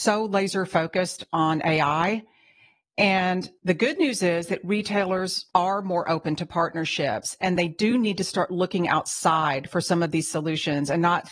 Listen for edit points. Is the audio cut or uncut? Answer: uncut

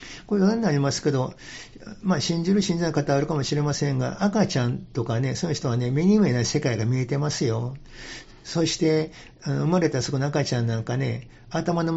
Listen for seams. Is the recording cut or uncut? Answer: cut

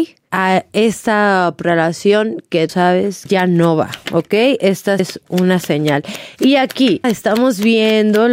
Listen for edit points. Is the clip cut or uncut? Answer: cut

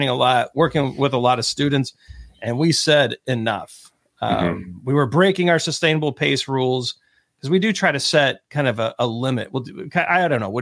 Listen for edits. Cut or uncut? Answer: uncut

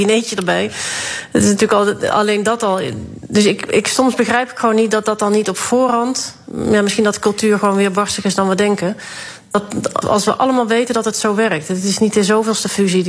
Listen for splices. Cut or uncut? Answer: cut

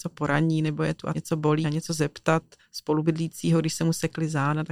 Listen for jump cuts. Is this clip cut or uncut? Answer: cut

